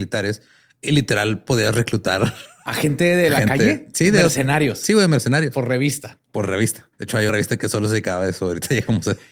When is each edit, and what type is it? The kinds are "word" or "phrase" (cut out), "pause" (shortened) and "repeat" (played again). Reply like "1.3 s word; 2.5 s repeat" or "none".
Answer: 6.9 s pause; 7.3 s word